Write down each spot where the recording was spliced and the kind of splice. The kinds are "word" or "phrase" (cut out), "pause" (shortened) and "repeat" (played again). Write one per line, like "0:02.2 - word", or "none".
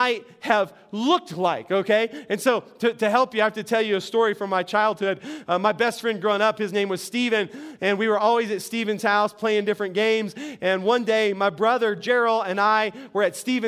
none